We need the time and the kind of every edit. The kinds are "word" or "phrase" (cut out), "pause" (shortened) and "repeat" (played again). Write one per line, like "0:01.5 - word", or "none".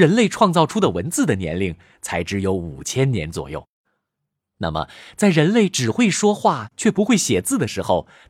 none